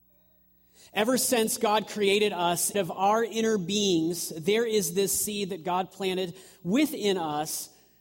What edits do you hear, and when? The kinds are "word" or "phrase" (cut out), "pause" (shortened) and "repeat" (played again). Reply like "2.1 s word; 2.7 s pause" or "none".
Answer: 2.7 s word